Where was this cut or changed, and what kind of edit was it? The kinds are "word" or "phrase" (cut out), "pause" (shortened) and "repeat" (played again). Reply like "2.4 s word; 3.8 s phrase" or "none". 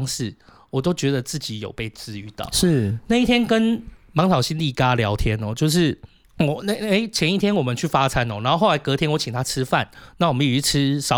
6.2 s pause

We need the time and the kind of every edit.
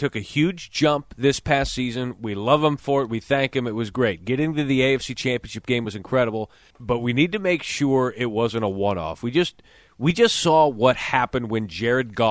none

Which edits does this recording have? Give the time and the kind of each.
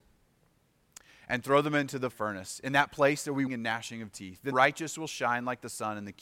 2.1 s word; 3.5 s word; 4.5 s word

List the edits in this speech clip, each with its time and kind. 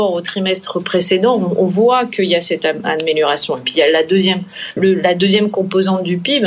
4.8 s word

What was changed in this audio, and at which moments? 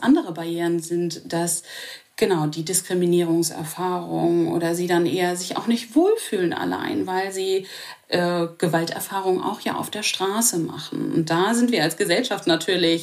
none

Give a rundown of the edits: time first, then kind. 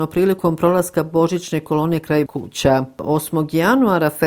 2.3 s word

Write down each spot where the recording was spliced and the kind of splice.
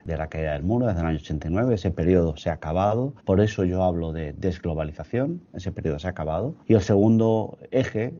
3.2 s pause; 6.6 s pause

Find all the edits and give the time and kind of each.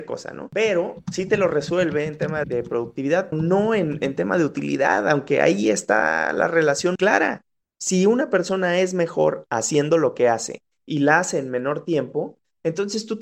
2.4 s word; 3.3 s word; 7.0 s word

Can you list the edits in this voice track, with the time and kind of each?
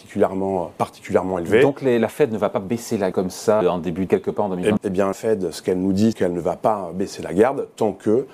3.1 s word; 3.6 s word; 4.1 s word; 4.8 s word; 5.1 s word; 6.1 s word

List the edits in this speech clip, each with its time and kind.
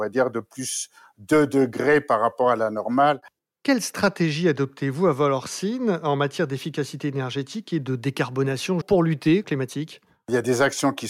8.8 s word; 9.4 s phrase

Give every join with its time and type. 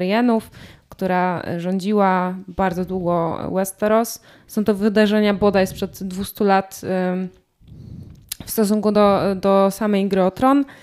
none

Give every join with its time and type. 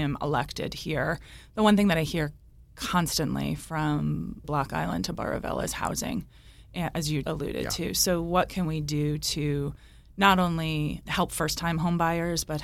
4.4 s word; 7.2 s word; 11.1 s word

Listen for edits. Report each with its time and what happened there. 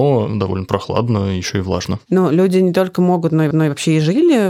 3.5 s repeat

